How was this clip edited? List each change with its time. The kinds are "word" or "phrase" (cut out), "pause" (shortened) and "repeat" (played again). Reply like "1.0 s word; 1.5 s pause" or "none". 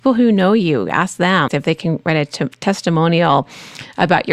1.5 s word

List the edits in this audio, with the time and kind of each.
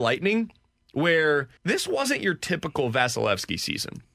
1.6 s pause

